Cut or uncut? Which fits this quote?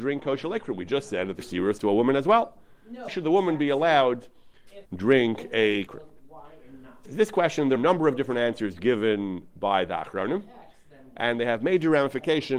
cut